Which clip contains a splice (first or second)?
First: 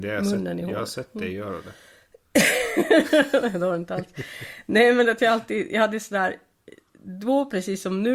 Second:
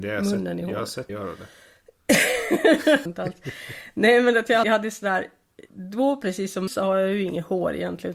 second